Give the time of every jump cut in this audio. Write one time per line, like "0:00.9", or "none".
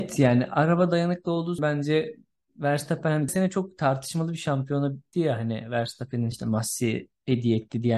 0:01.6
0:03.3
0:05.1
0:06.3